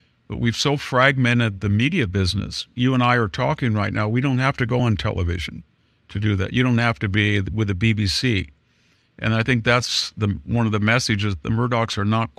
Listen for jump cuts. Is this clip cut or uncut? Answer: uncut